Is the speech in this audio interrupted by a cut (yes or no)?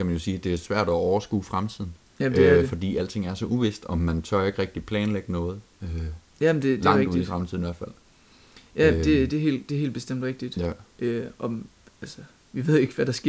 no